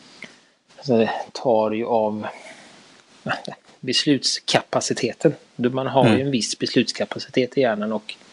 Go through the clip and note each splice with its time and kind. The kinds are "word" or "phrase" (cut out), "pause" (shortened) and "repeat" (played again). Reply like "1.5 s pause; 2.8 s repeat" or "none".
none